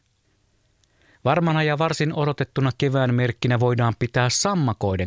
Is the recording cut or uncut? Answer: uncut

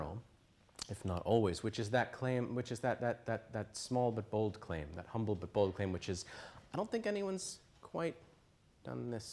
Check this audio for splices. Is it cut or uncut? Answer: uncut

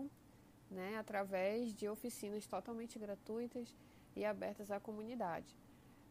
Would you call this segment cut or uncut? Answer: uncut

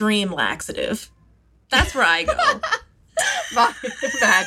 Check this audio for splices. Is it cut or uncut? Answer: uncut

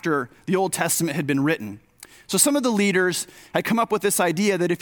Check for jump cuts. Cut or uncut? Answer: uncut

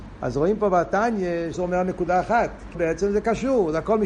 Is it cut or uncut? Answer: cut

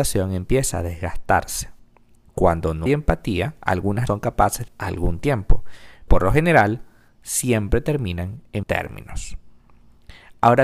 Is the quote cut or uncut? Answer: cut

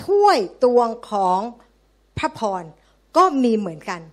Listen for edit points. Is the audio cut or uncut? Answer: uncut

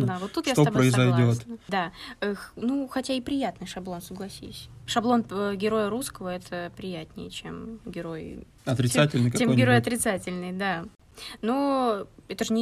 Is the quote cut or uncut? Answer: uncut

